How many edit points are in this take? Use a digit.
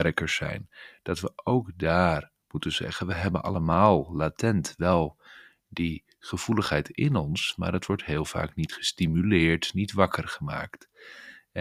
0